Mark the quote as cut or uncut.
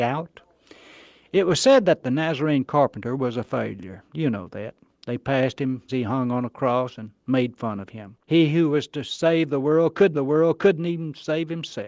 cut